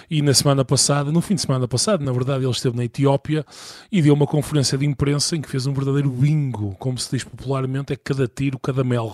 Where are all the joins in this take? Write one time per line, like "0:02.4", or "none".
none